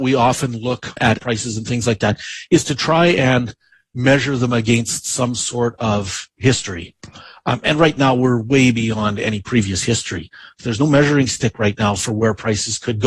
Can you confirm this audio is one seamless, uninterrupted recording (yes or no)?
yes